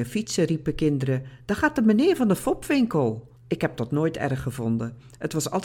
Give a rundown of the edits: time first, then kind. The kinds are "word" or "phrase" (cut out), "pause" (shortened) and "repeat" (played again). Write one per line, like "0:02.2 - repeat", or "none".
0:03.4 - pause

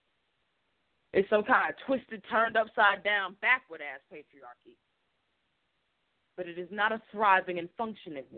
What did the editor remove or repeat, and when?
none

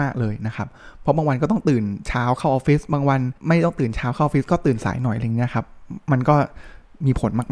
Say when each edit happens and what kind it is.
0:03.4 - pause

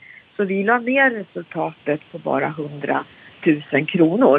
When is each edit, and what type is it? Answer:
none

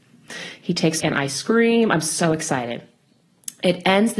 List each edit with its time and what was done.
0:01.0 - phrase

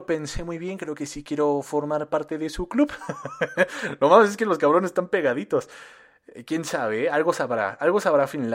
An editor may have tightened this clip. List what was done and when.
none

